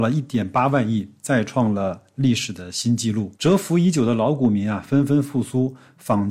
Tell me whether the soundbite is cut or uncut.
cut